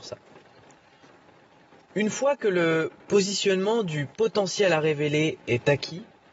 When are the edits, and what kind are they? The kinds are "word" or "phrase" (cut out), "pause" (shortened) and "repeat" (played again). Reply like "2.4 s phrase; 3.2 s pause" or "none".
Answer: none